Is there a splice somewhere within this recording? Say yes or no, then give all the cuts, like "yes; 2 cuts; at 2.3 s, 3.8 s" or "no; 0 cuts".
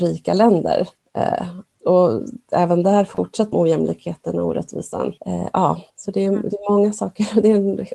yes; 5 cuts; at 1.0 s, 1.7 s, 3.5 s, 5.2 s, 5.9 s